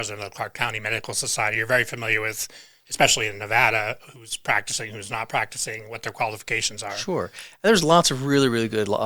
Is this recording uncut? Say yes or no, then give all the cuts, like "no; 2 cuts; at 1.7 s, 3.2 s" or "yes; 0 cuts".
yes; 0 cuts